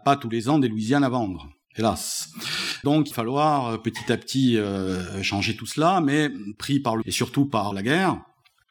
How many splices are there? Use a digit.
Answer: 3